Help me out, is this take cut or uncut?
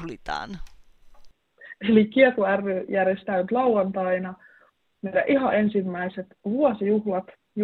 uncut